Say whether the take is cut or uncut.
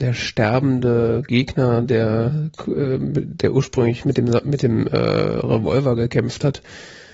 uncut